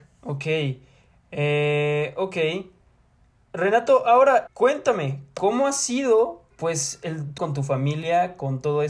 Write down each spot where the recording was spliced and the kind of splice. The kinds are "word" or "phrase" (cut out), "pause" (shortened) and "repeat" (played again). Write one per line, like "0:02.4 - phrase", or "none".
0:04.5 - word
0:06.5 - word
0:07.4 - word